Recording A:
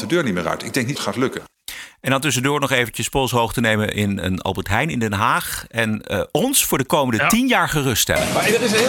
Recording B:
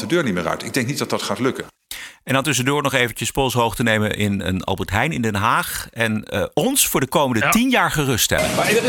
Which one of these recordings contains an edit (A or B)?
A